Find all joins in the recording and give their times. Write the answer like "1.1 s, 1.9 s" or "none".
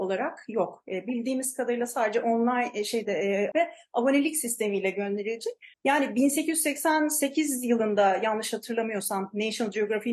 3.5 s, 5.7 s